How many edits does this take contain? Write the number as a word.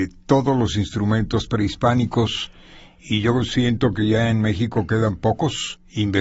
zero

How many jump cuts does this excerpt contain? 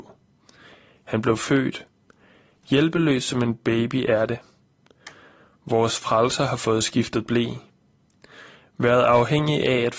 zero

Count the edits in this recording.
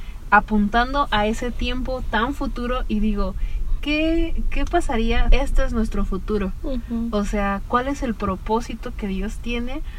two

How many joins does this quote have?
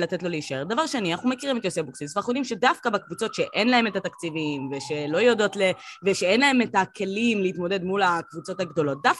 zero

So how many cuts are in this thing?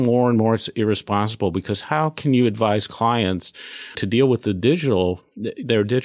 one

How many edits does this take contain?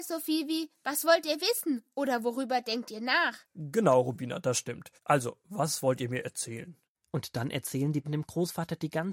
four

